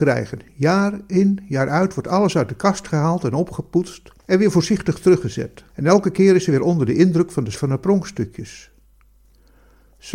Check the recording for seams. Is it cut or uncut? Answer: cut